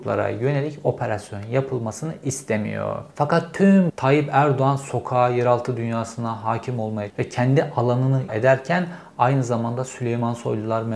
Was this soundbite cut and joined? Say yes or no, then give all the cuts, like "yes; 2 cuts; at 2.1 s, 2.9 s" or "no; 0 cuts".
yes; 4 cuts; at 3.1 s, 3.9 s, 7.1 s, 8.3 s